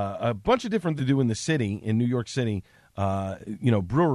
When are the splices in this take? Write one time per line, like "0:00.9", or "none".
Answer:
0:01.0